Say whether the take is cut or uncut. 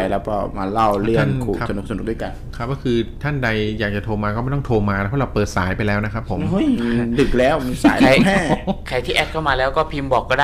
uncut